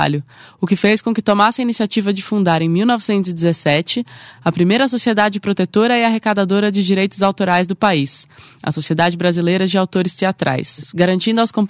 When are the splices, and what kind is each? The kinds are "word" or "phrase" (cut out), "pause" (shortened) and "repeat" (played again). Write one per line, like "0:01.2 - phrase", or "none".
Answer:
none

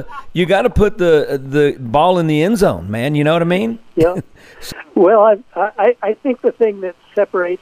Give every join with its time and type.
0:05.5 - pause

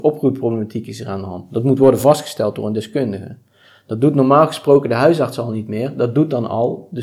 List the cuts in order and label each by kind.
none

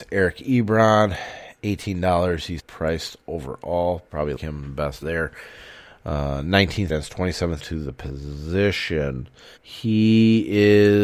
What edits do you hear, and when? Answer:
0:02.6 - word
0:04.4 - word
0:05.0 - word
0:06.9 - phrase
0:07.6 - phrase
0:09.6 - pause

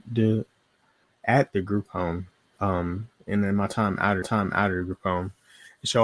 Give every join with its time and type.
0:02.6 - word
0:04.2 - repeat

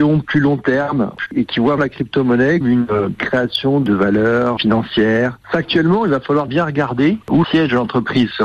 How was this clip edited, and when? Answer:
0:01.3 - word
0:01.8 - word
0:02.6 - word
0:04.6 - word
0:06.5 - word
0:07.4 - word

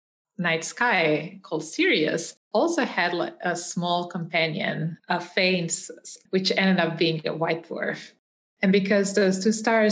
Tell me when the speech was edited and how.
0:02.4 - pause
0:05.0 - pause
0:06.3 - word

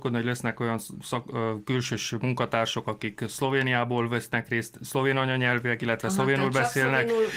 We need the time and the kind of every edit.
none

